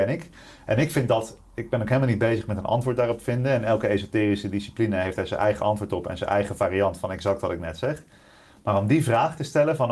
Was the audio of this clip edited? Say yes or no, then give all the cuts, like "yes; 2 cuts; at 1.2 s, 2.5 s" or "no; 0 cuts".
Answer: no; 0 cuts